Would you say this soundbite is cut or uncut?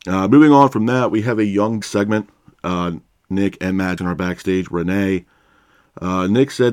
cut